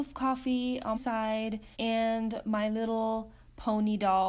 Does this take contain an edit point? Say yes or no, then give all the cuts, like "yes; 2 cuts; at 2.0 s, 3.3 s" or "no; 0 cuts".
yes; 2 cuts; at 0.9 s, 1.7 s